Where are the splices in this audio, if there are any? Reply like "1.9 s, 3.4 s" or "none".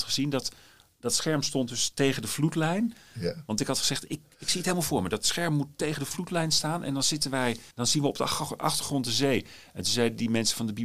7.7 s